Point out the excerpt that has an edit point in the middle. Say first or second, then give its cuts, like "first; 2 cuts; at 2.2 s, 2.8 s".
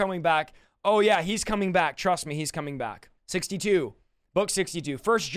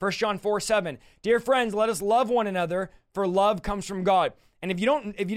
first; 1 cut; at 3.2 s